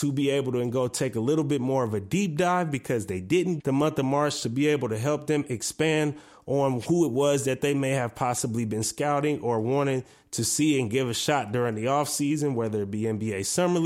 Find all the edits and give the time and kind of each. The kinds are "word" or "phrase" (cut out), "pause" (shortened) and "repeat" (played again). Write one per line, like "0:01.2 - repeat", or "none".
0:03.6 - word